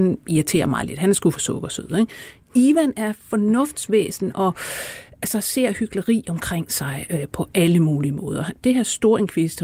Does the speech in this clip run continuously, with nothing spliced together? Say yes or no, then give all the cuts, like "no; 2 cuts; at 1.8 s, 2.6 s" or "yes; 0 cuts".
yes; 0 cuts